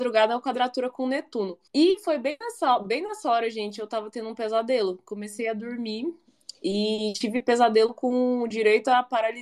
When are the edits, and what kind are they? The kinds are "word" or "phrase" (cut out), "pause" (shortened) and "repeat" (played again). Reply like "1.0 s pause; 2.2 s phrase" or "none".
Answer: 1.7 s pause